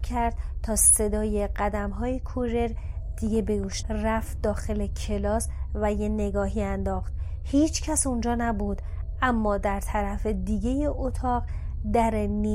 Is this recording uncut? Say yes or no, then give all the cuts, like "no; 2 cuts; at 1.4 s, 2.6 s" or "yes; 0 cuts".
no; 1 cut; at 3.8 s